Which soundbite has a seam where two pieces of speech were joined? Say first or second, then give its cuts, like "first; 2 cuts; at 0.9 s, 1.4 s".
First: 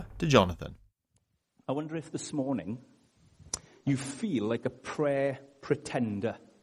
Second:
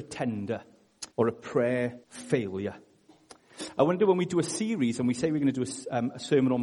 second; 2 cuts; at 1.1 s, 2.0 s